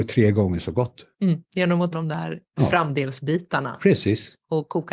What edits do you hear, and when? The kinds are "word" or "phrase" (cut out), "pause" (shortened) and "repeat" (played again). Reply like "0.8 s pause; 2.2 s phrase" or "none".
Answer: 1.4 s pause; 1.9 s word